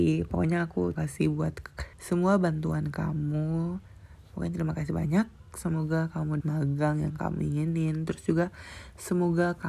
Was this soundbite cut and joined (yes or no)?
yes